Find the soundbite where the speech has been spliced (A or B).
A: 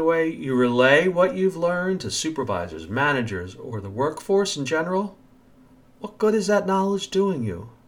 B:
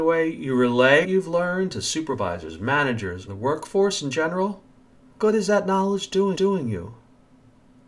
B